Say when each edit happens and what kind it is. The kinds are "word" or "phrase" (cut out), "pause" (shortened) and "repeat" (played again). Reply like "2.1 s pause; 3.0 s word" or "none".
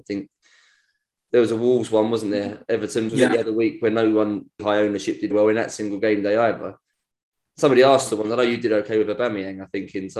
3.1 s word; 4.6 s word; 5.3 s word

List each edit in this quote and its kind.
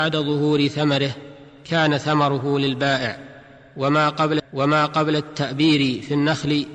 4.4 s repeat

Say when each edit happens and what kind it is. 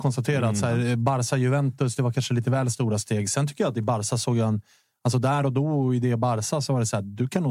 none

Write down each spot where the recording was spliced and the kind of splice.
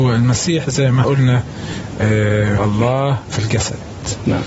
1.0 s word; 2.6 s word; 3.3 s phrase

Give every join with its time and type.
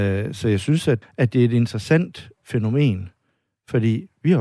1.0 s word; 2.4 s word

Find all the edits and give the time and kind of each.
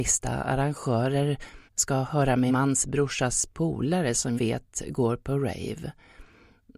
1.7 s pause; 2.5 s word; 4.4 s word

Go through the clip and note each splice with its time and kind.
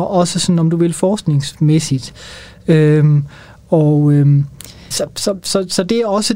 4.9 s word

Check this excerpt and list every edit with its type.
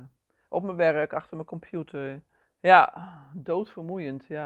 2.4 s pause

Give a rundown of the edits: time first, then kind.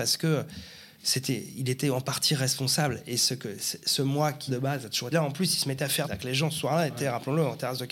4.5 s word; 5.1 s word; 6.0 s word

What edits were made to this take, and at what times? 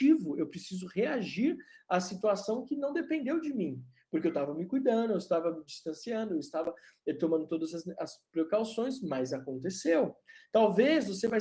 none

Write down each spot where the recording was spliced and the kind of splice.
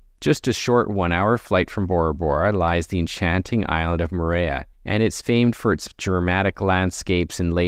4.7 s pause

